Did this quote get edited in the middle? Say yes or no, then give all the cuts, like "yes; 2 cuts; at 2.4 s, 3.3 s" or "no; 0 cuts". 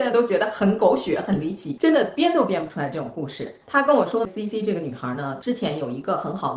yes; 1 cut; at 3.6 s